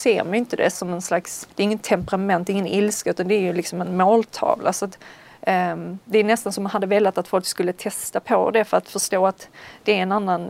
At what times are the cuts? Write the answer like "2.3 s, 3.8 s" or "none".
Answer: 1.5 s